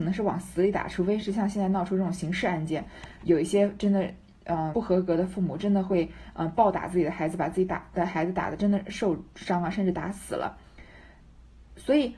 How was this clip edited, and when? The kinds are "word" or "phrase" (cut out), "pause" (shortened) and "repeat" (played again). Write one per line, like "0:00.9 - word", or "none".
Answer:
0:04.7 - word